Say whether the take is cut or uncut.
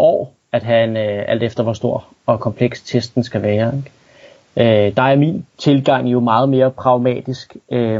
cut